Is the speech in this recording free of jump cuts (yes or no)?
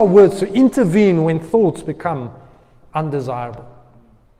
yes